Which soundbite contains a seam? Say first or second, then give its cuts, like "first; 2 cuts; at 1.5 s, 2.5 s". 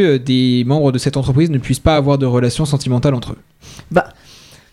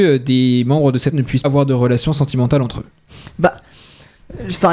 second; 2 cuts; at 1.1 s, 1.4 s